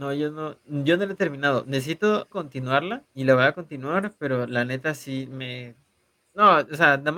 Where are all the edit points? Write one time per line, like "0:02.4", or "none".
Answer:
0:02.3
0:03.1